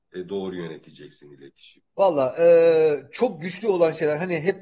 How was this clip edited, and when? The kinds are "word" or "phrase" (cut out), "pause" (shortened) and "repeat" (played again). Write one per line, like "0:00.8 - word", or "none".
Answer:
0:01.9 - pause